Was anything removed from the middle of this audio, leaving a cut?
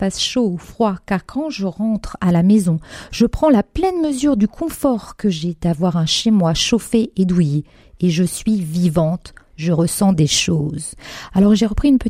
no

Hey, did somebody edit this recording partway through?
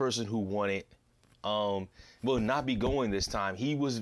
no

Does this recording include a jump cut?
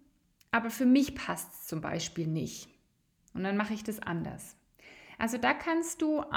no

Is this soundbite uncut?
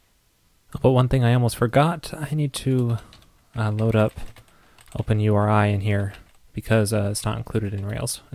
yes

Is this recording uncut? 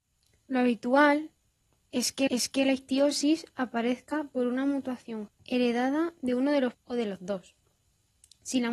no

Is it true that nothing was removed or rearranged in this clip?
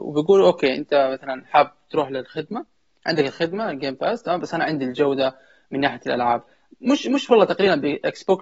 yes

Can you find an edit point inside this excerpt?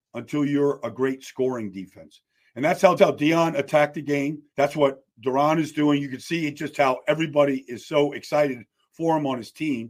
yes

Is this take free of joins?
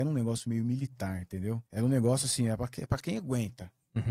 no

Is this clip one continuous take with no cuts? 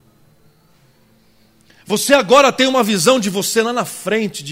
yes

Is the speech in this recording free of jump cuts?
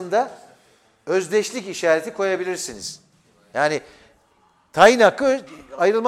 yes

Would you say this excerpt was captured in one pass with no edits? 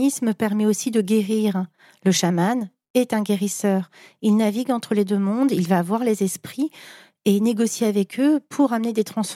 yes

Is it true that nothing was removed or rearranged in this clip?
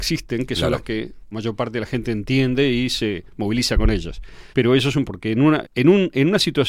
no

